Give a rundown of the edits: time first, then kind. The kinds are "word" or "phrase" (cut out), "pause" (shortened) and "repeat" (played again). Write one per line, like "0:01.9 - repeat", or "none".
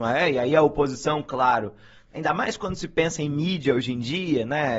none